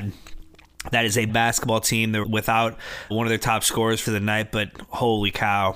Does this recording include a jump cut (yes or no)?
yes